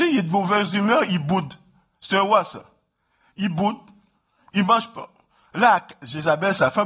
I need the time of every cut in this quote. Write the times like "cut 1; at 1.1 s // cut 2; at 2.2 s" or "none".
none